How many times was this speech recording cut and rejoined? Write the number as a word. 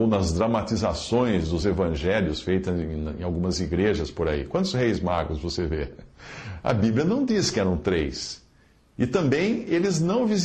zero